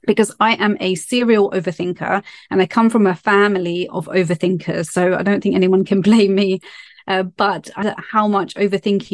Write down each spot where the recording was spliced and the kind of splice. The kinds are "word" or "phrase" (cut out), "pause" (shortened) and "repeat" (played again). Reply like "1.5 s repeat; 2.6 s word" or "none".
7.8 s word

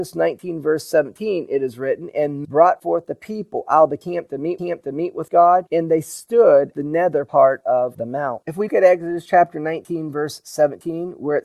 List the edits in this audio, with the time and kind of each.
2.4 s word; 4.6 s repeat; 6.7 s word; 8.7 s word

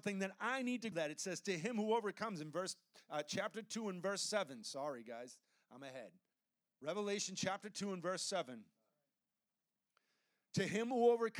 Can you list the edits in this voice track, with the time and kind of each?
0.9 s phrase; 6.3 s pause

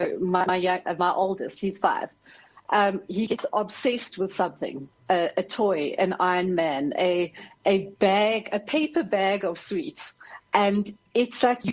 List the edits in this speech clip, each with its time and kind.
5.0 s pause

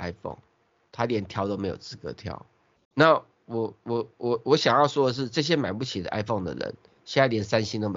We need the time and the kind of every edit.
2.8 s word

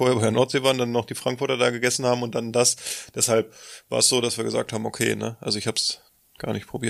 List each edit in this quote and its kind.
none

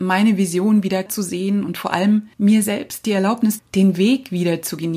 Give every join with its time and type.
1.1 s word; 2.3 s pause; 3.6 s phrase

